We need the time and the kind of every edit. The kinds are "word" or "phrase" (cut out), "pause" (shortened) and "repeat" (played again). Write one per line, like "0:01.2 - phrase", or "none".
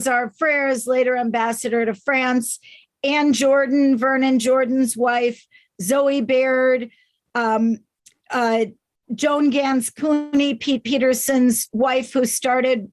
none

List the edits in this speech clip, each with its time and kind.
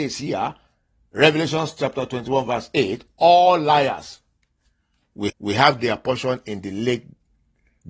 0:05.3 - repeat

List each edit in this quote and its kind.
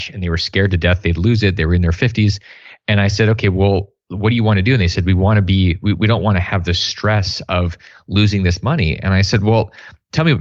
none

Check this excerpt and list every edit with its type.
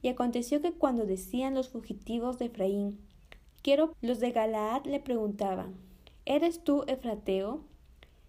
0:03.9 - word

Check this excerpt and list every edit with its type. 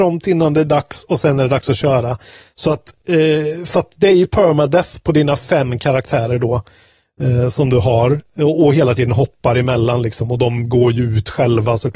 none

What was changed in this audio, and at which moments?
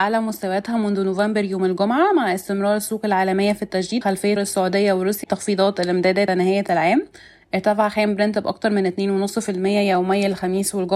0:04.0 - word
0:04.4 - word
0:05.2 - word
0:06.3 - word

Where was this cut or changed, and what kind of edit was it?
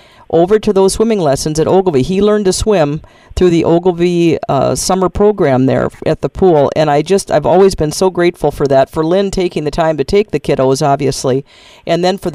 none

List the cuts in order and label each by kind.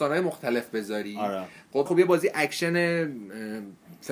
0:01.9 - word

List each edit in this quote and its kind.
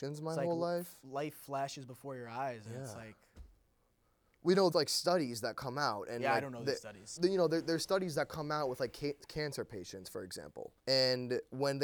0:04.7 - word
0:07.2 - word
0:10.8 - pause

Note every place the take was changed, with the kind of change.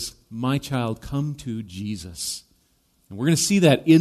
none

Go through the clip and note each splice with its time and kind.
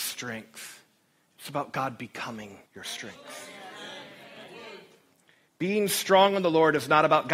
0:02.7 - pause

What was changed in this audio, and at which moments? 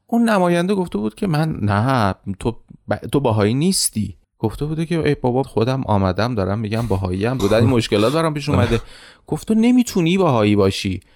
0:04.2 - pause
0:05.4 - word
0:07.4 - phrase
0:09.5 - phrase

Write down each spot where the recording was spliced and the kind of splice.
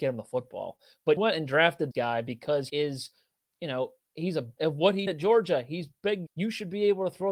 0:01.2 - word
0:01.9 - word
0:02.7 - word
0:04.6 - word
0:05.1 - word
0:06.3 - word

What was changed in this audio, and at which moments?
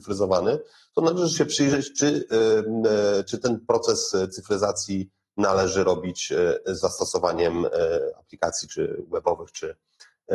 none

